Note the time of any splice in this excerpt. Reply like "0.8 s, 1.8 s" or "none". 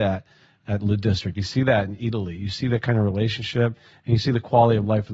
none